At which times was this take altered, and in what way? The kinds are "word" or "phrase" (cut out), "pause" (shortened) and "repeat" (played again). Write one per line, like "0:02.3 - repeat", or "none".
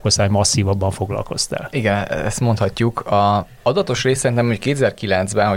0:03.6 - pause